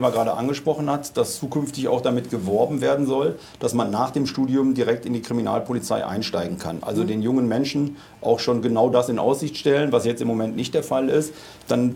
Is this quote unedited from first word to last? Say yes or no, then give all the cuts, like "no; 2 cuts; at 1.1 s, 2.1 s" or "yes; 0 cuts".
yes; 0 cuts